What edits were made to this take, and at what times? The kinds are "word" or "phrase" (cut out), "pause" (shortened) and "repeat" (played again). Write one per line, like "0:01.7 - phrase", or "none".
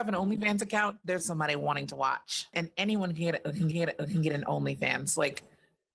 0:01.2 - word
0:03.7 - repeat